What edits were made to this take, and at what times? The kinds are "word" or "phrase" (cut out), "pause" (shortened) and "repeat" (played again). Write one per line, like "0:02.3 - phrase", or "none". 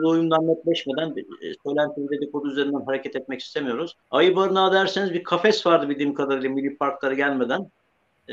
0:04.0 - pause